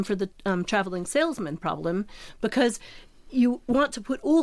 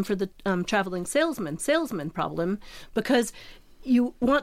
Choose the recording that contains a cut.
second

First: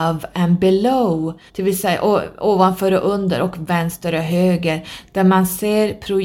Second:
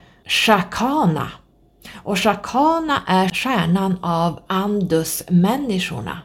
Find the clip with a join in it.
first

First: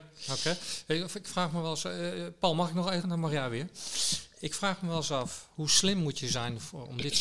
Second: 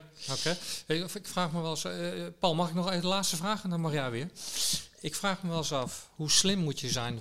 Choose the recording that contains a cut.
first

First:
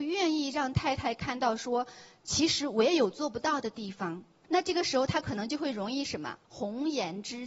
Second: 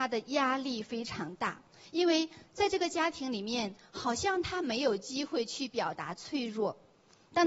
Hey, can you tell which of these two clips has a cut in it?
first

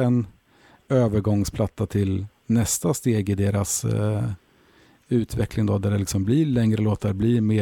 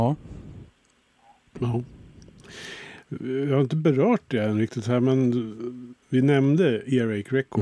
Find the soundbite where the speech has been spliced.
second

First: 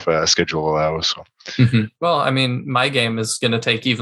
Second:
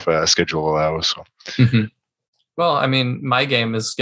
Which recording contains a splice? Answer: first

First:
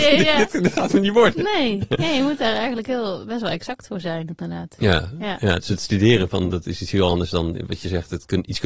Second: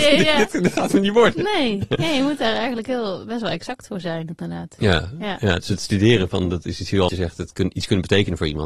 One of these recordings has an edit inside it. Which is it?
second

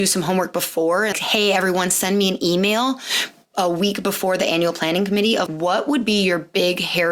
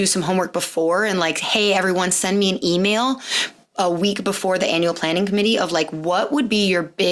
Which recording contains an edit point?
first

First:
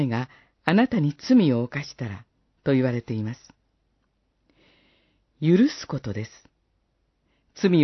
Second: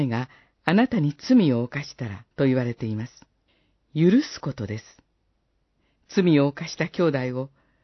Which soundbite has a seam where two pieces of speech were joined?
second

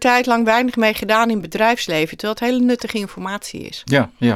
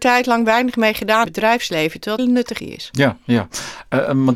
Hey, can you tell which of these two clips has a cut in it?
second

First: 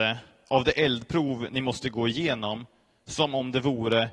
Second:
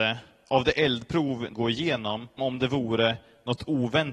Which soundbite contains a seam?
second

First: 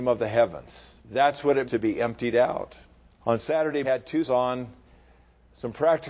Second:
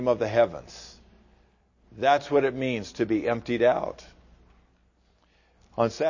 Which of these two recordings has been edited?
first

